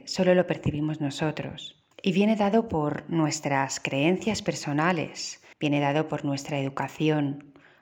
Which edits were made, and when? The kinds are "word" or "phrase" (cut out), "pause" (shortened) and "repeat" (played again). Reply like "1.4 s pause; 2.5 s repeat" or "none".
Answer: 1.9 s pause; 5.5 s pause

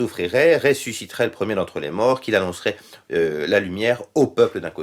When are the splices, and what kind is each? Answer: none

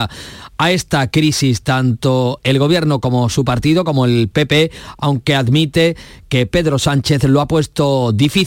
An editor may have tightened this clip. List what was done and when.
none

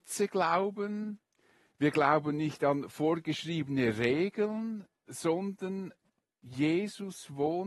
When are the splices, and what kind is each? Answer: none

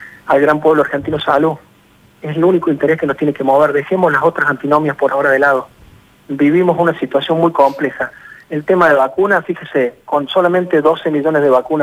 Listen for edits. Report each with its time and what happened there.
none

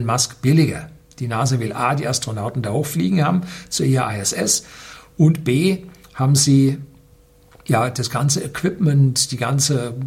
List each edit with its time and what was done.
none

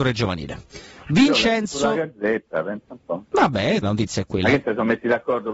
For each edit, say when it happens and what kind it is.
3.8 s word

